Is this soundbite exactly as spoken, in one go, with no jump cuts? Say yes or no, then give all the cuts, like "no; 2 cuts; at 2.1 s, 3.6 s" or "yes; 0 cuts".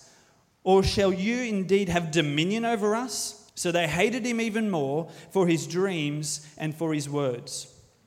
no; 1 cut; at 3.5 s